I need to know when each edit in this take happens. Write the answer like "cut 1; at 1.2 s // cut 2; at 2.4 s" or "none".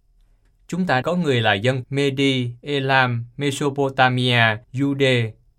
cut 1; at 1.0 s // cut 2; at 1.8 s // cut 3; at 4.6 s